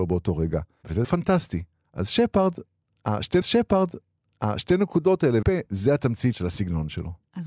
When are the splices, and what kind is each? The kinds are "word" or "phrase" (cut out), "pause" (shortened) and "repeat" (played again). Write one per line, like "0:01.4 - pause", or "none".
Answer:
0:01.0 - word
0:03.4 - repeat
0:05.4 - word